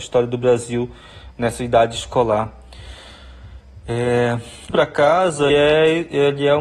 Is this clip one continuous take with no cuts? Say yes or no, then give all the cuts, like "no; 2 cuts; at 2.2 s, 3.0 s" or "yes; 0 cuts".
no; 2 cuts; at 4.7 s, 5.5 s